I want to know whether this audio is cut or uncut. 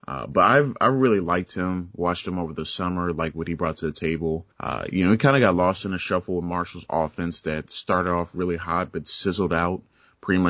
cut